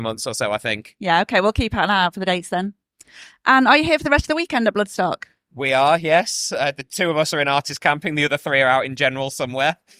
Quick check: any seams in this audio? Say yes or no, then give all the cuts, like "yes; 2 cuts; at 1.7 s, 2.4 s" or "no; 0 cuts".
no; 0 cuts